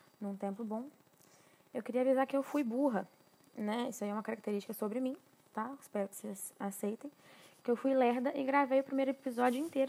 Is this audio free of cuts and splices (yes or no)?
yes